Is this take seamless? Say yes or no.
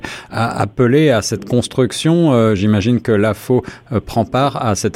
yes